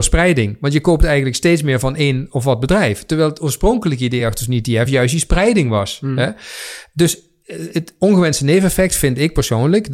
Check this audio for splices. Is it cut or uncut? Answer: uncut